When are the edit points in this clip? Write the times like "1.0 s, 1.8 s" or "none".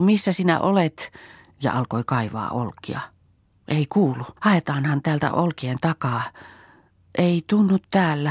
4.4 s